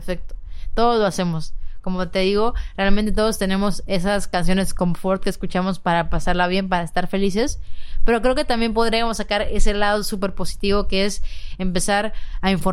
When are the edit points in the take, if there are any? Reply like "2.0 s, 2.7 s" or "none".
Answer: none